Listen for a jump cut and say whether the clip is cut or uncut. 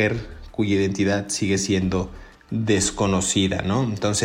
uncut